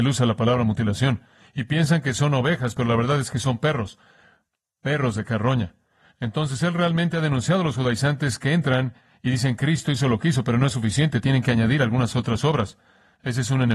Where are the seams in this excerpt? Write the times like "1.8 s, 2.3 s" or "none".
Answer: none